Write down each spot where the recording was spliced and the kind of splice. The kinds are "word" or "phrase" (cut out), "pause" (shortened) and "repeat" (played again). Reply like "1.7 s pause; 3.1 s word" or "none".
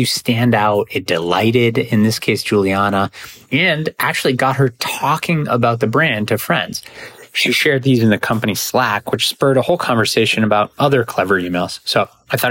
none